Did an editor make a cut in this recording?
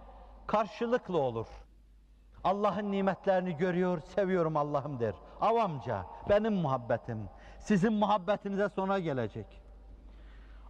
no; 0 cuts

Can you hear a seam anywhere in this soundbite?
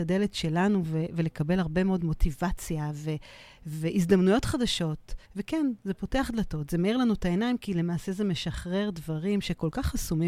yes; 1 cut; at 5.2 s

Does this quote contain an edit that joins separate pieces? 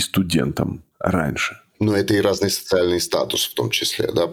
no; 0 cuts

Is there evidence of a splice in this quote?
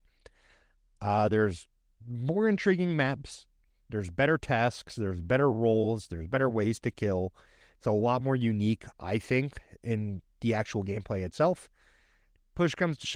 no; 0 cuts

